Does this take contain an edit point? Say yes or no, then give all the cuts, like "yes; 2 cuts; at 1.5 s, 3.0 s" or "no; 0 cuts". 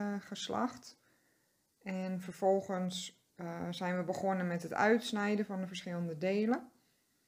yes; 1 cut; at 3.3 s